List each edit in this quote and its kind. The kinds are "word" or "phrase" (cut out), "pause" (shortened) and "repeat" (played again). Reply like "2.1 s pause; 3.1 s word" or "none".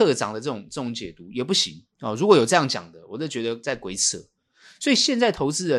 1.9 s pause